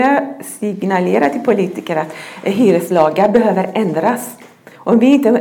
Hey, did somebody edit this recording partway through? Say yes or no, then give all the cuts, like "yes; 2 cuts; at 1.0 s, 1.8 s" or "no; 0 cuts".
no; 0 cuts